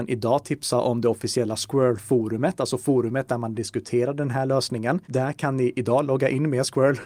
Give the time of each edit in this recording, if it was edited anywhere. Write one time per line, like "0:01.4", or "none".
0:05.0